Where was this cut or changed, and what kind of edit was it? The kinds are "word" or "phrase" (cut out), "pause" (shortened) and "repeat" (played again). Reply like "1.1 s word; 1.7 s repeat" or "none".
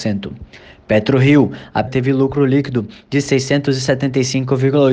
1.9 s word